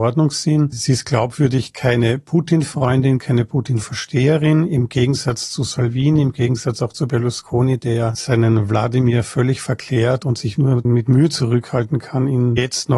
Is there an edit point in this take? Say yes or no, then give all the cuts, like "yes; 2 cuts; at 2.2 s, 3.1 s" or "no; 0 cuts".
yes; 1 cut; at 10.5 s